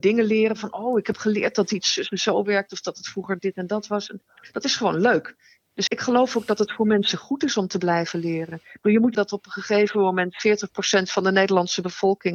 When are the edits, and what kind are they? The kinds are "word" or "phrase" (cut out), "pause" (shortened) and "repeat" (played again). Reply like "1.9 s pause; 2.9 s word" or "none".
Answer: 5.9 s word; 9.1 s phrase